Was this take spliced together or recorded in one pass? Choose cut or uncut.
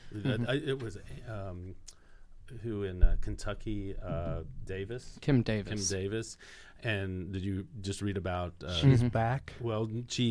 uncut